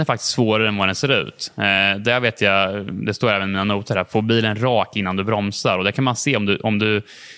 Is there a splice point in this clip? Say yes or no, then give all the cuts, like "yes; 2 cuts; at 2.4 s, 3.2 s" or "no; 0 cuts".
no; 0 cuts